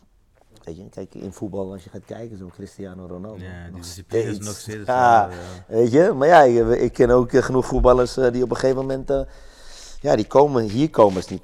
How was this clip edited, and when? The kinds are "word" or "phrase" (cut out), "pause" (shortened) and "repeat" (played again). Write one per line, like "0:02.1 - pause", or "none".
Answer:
none

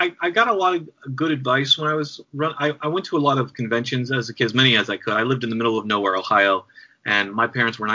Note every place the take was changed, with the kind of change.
0:02.2 - pause

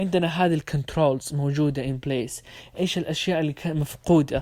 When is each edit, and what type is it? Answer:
none

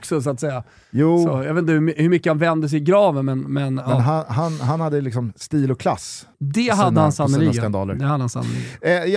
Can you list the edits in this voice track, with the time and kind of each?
0:05.4 - pause
0:06.3 - pause

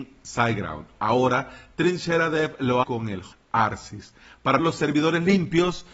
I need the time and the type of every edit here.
0:02.8 - word
0:03.3 - word
0:04.6 - word

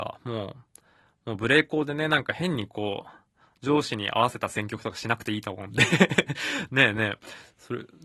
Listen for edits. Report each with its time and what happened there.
none

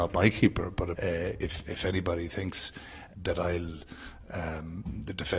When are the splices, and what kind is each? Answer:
0:00.9 - word
0:01.6 - word
0:03.1 - word

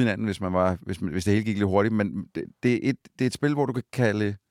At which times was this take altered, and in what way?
none

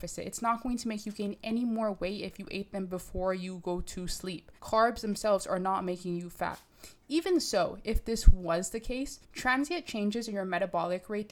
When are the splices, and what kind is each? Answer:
0:04.6 - pause
0:09.2 - pause

